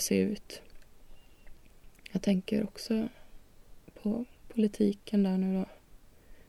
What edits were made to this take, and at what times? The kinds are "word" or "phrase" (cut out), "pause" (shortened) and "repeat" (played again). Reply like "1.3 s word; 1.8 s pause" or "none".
none